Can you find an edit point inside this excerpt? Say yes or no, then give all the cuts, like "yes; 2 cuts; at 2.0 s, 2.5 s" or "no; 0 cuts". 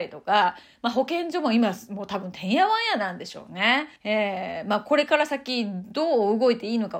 yes; 1 cut; at 4.0 s